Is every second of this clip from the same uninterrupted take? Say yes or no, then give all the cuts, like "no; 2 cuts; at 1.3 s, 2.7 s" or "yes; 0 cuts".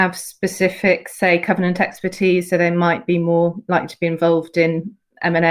yes; 0 cuts